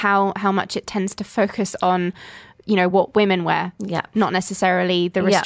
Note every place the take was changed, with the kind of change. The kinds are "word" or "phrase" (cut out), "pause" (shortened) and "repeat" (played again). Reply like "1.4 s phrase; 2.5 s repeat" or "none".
none